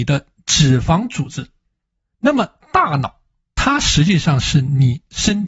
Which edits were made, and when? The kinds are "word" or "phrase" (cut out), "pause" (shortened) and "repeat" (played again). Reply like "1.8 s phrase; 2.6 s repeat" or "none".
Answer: none

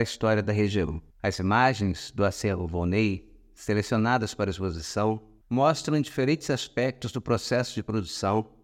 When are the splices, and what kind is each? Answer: 1.1 s pause; 5.4 s pause

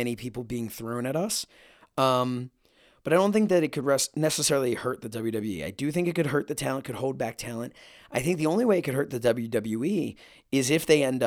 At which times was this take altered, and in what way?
none

